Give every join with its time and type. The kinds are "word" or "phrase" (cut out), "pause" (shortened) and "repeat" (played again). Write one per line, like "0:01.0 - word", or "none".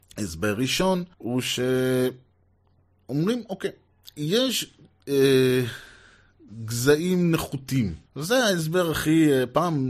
0:01.1 - pause
0:08.1 - pause